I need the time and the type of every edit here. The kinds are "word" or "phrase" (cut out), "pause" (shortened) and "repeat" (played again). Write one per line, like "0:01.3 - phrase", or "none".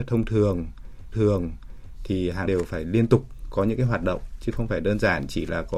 0:01.1 - repeat
0:02.5 - word